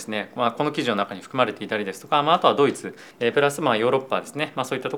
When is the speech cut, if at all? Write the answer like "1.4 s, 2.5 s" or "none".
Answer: 3.1 s